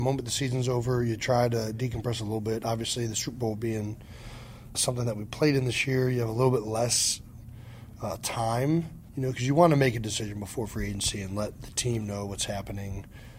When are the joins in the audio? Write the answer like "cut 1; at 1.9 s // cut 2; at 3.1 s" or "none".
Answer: cut 1; at 4.7 s // cut 2; at 9.1 s